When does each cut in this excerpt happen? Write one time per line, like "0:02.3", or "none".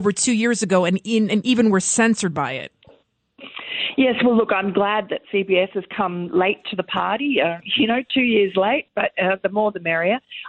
none